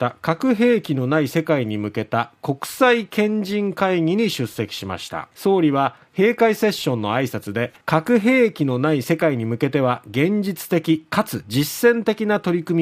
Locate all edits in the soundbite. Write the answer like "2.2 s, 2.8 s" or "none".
5.3 s, 7.8 s